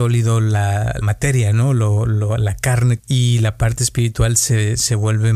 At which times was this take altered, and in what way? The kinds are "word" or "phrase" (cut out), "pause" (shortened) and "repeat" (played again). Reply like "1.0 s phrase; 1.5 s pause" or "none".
1.0 s word; 3.0 s phrase